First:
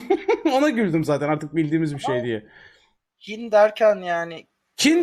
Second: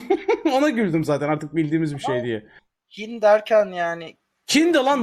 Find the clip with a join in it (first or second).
second